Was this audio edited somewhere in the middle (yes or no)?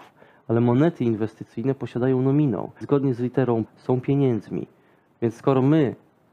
yes